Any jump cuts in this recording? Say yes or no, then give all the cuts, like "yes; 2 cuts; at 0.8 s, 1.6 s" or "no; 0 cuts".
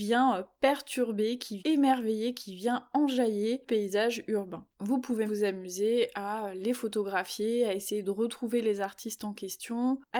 yes; 4 cuts; at 1.6 s, 3.6 s, 4.7 s, 5.2 s